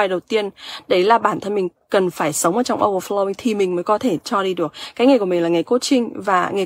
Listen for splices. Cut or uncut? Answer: uncut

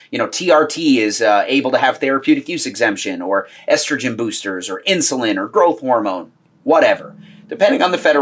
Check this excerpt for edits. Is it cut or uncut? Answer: uncut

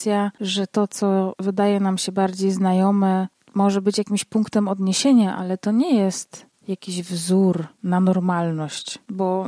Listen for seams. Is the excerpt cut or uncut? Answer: uncut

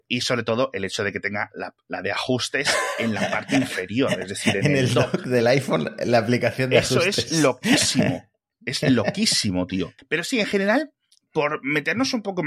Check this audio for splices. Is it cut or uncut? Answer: uncut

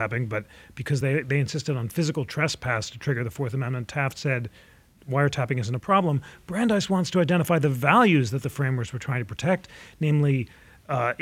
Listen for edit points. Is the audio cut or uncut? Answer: uncut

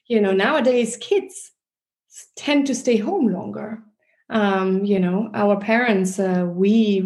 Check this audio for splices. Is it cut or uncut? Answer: uncut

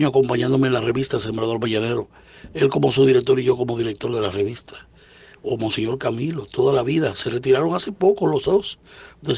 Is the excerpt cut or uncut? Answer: uncut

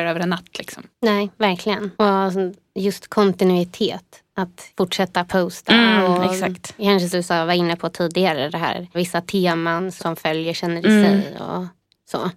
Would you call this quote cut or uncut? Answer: cut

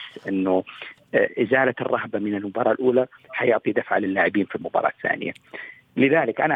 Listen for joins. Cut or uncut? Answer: uncut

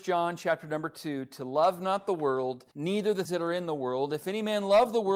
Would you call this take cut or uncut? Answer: cut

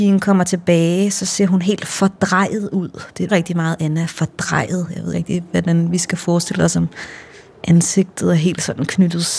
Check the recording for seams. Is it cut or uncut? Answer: cut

